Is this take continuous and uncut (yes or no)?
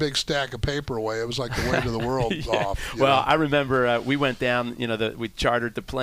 yes